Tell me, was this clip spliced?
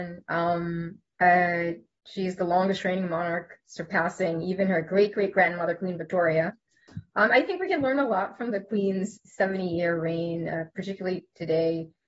no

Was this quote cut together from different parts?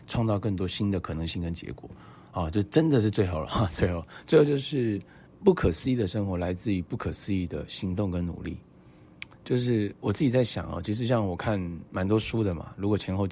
yes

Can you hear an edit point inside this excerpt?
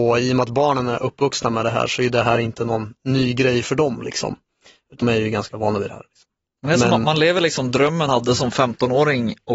yes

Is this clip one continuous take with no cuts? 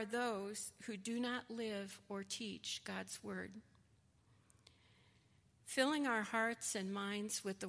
yes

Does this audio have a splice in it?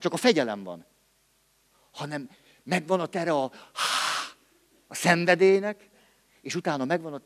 no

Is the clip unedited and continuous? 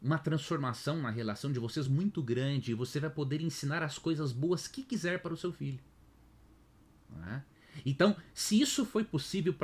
yes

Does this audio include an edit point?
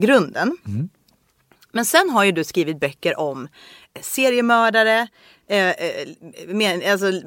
no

